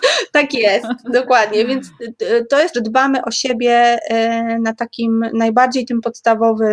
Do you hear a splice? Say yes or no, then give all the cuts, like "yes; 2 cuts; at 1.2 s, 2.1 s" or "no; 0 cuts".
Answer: yes; 1 cut; at 2.7 s